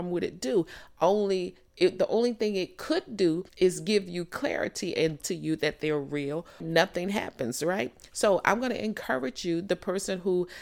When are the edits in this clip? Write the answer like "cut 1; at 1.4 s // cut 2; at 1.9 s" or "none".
cut 1; at 3.5 s // cut 2; at 5.2 s // cut 3; at 6.6 s